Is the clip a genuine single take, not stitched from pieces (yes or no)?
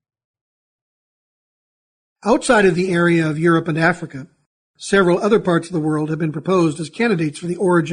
yes